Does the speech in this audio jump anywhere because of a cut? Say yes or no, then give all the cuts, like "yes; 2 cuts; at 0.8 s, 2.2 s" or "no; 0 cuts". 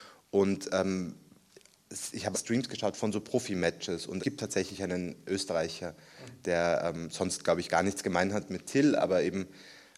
yes; 2 cuts; at 2.3 s, 4.2 s